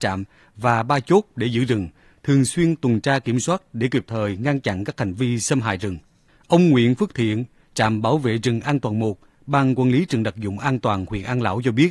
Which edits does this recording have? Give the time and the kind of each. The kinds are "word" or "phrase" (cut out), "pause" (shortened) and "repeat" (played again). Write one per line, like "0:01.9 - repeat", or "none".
none

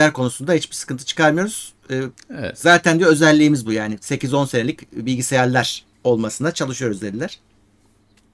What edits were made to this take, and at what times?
0:05.9 - pause

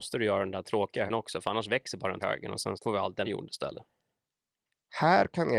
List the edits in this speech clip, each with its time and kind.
0:01.1 - word
0:02.2 - word
0:02.7 - word
0:03.2 - word

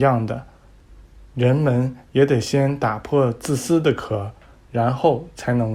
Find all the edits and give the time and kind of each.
none

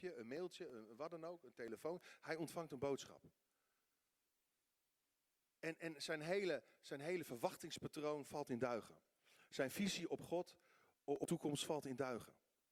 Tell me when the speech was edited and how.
0:11.2 - word

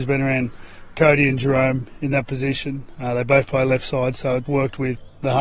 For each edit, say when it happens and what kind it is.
0:04.5 - word

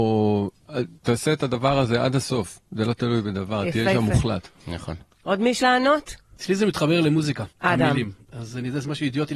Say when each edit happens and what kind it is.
0:01.0 - pause
0:05.6 - word
0:07.5 - pause

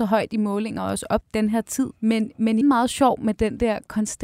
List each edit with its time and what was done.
0:01.2 - word
0:02.0 - pause
0:02.6 - word

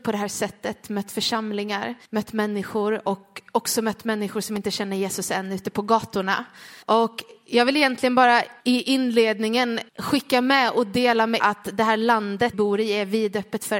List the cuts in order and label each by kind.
0:02.0 - pause
0:06.8 - pause
0:08.6 - pause
0:09.9 - pause
0:11.4 - word
0:12.5 - phrase

